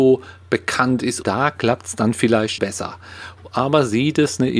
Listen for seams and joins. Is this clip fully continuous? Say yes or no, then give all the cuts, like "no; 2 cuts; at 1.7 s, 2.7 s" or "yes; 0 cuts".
no; 2 cuts; at 1.2 s, 2.6 s